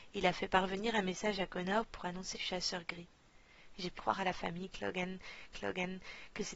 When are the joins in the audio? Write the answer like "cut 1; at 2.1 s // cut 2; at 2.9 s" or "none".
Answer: cut 1; at 2.3 s // cut 2; at 4.0 s // cut 3; at 5.5 s